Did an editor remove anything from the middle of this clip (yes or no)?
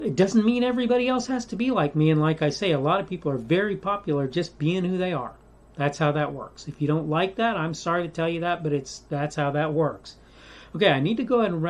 no